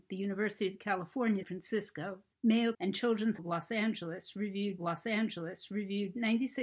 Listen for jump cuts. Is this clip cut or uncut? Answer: cut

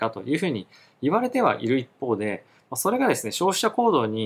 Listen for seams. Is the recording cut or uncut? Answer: uncut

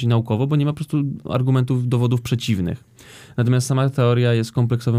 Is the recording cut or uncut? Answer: uncut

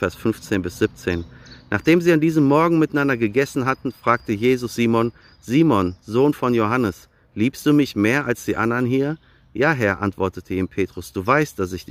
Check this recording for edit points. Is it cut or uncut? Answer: uncut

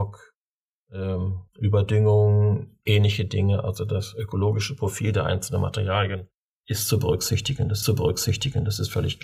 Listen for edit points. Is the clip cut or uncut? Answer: cut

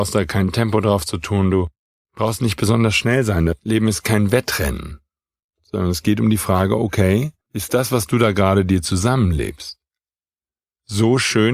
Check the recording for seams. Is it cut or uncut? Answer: cut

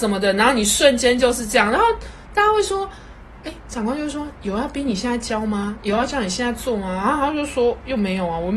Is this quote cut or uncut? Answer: uncut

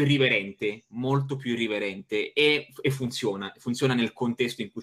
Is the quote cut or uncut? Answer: uncut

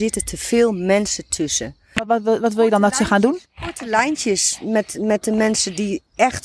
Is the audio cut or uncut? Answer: uncut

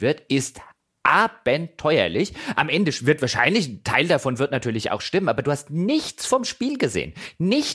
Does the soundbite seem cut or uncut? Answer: uncut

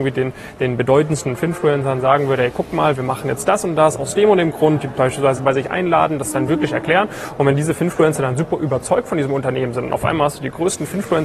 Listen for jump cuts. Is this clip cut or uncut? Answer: uncut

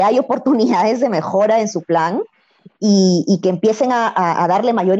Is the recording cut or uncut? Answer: uncut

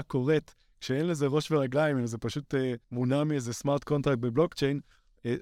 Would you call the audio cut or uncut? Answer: cut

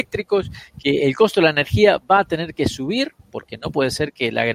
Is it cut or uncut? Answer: cut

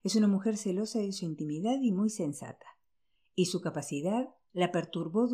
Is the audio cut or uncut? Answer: uncut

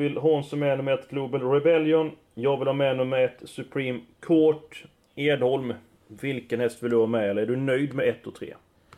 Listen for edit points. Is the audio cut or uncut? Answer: uncut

